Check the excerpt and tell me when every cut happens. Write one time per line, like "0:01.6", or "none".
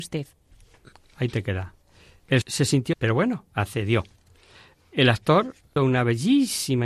0:02.4
0:02.9
0:05.8